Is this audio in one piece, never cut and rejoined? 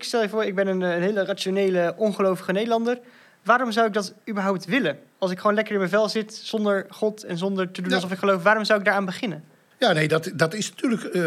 yes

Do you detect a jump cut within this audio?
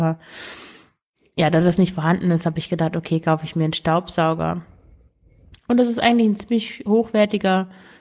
no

